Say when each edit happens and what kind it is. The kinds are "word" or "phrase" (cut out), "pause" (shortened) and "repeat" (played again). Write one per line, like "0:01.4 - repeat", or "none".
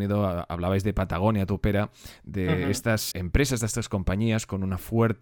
0:03.1 - word